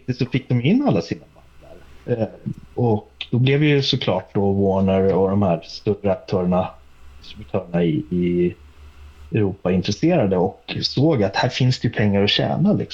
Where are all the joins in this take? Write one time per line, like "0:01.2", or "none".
none

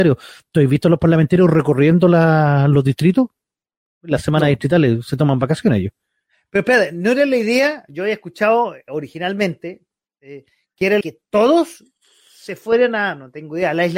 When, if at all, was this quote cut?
0:11.0

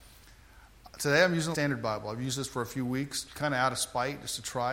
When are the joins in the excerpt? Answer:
0:01.5
0:03.3

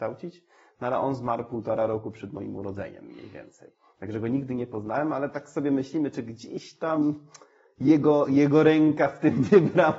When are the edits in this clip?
none

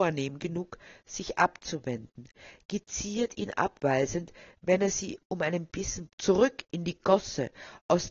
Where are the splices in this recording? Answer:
0:06.1

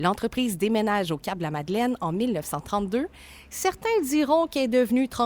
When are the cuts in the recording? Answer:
none

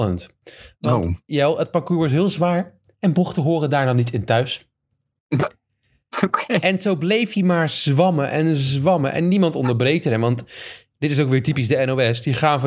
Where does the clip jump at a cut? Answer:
none

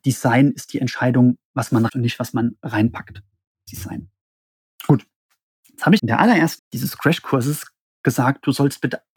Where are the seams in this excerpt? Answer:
0:01.9
0:03.7
0:06.0
0:06.6

